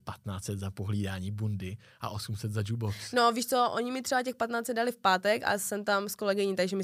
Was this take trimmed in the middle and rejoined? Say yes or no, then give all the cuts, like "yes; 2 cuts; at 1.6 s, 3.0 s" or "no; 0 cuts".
no; 0 cuts